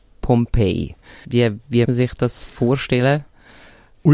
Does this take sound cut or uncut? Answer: cut